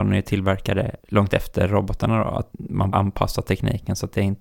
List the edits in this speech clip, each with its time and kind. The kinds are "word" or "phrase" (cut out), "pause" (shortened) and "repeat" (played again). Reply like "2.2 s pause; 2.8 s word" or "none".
1.0 s word; 2.5 s word; 2.9 s phrase